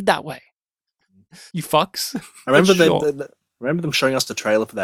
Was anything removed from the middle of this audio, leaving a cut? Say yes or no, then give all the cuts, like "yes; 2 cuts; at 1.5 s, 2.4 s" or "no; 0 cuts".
yes; 2 cuts; at 1.5 s, 2.4 s